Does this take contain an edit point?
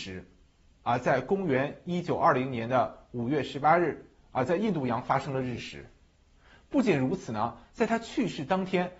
no; 0 cuts

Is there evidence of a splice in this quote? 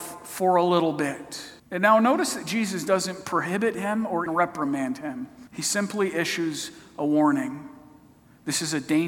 yes; 3 cuts; at 1.6 s, 4.3 s, 5.5 s

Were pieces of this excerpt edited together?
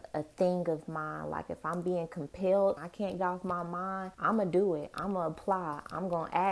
yes; 3 cuts; at 2.8 s, 3.2 s, 4.1 s

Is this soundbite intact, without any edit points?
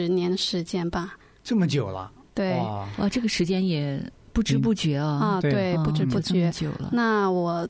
yes; 0 cuts

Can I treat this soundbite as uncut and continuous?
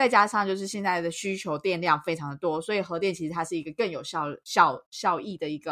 yes; 0 cuts

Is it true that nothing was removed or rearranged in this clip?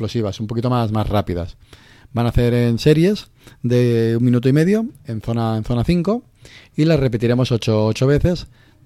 yes; 0 cuts

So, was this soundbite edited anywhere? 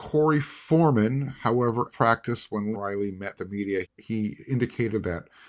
yes; 4 cuts; at 1.9 s, 2.7 s, 3.3 s, 3.8 s

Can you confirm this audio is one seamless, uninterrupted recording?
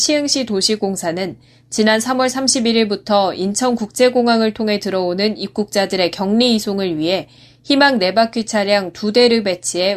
yes; 0 cuts

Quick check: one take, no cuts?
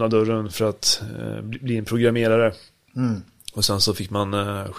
yes; 0 cuts

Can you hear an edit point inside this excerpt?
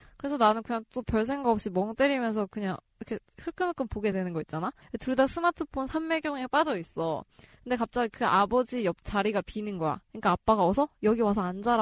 no; 0 cuts

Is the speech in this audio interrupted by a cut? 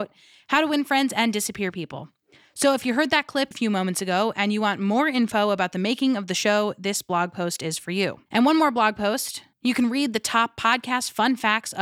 yes; 3 cuts; at 3.5 s, 8.3 s, 9.5 s

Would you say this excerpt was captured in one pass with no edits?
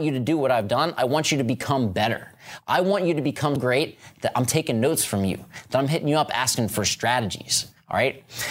no; 1 cut; at 3.6 s

